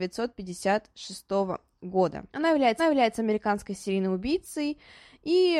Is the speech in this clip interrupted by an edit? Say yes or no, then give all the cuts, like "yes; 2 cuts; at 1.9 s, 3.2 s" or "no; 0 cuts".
yes; 2 cuts; at 2.3 s, 2.8 s